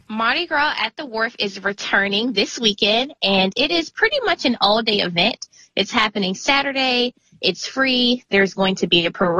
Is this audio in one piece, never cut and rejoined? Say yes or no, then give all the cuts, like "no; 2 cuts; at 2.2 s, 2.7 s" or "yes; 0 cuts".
yes; 0 cuts